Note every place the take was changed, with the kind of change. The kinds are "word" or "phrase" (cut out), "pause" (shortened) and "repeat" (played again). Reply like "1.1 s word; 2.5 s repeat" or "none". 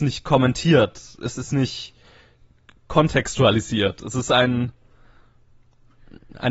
none